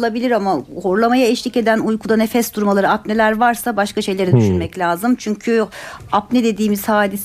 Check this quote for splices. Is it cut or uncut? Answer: uncut